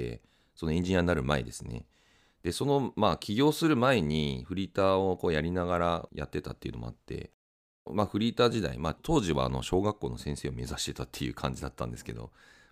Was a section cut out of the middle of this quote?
no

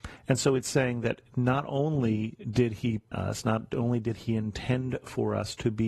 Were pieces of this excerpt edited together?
yes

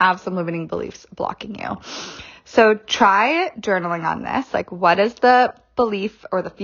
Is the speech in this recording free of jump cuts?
yes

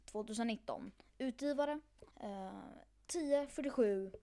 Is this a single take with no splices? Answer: no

